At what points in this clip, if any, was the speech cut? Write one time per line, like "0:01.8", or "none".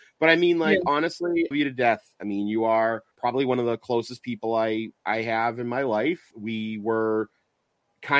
0:01.5
0:03.1
0:05.0
0:06.3